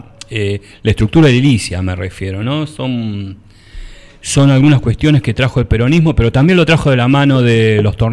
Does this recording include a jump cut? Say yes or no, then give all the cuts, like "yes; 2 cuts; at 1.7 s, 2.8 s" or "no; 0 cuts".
no; 0 cuts